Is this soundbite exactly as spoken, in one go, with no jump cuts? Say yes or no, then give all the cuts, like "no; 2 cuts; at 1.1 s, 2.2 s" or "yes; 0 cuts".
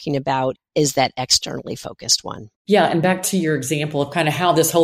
yes; 0 cuts